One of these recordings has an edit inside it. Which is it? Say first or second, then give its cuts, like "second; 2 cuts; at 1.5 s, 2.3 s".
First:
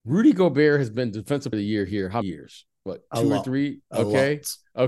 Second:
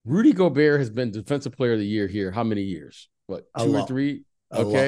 first; 3 cuts; at 1.5 s, 2.2 s, 3.8 s